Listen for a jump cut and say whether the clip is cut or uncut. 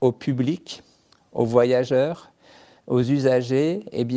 uncut